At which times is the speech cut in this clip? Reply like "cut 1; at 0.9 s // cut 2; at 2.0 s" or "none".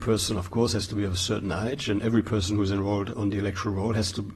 cut 1; at 3.1 s